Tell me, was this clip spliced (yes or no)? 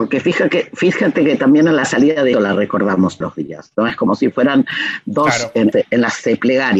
yes